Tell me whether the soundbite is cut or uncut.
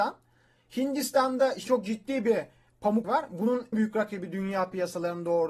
cut